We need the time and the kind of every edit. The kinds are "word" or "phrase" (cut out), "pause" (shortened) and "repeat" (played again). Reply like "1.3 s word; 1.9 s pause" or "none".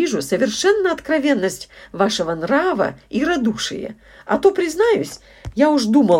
none